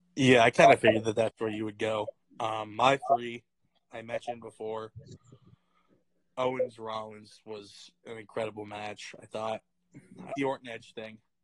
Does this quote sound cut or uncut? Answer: cut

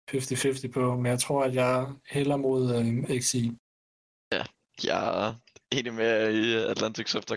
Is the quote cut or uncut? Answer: uncut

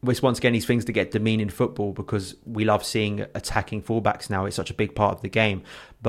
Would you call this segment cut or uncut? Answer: cut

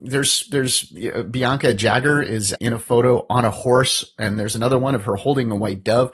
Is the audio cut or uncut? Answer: cut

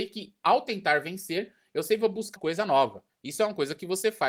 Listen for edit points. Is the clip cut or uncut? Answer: cut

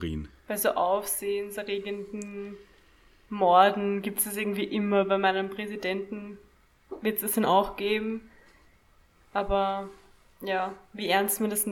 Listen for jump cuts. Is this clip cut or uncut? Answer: uncut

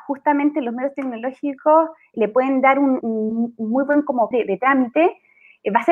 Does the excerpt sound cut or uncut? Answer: cut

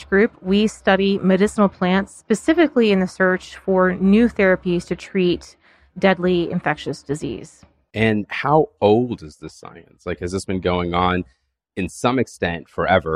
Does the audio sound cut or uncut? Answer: uncut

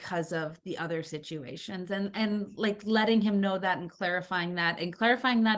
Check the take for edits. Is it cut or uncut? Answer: uncut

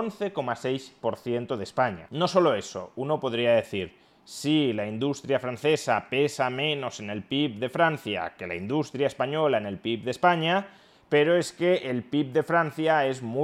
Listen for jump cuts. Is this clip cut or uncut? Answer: uncut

